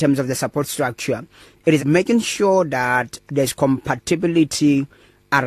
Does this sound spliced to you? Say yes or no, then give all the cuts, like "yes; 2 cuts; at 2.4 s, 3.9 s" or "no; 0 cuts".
yes; 2 cuts; at 1.8 s, 3.3 s